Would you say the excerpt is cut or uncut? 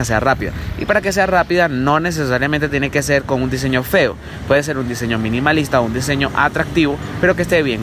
uncut